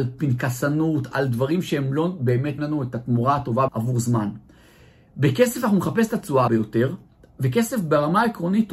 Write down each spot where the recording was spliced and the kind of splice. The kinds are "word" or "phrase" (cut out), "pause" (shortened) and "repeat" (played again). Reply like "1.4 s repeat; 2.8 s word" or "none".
1.1 s word; 2.6 s word; 3.7 s word; 6.5 s word